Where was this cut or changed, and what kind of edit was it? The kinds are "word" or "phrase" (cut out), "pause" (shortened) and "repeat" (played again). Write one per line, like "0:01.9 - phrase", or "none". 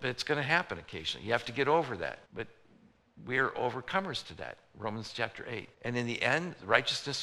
0:02.2 - pause
0:05.7 - pause